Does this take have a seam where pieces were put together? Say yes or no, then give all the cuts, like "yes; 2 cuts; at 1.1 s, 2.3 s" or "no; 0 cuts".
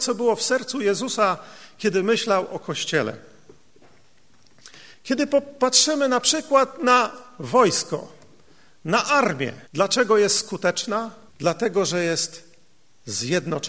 yes; 2 cuts; at 9.6 s, 11.3 s